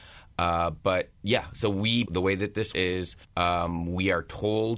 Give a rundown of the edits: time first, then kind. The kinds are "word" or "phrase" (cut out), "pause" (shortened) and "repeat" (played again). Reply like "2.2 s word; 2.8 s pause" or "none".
2.0 s word; 2.7 s word; 3.2 s pause